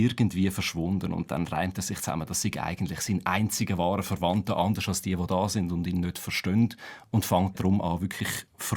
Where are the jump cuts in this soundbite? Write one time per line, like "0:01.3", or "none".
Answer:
0:07.5